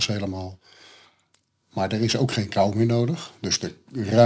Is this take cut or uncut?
uncut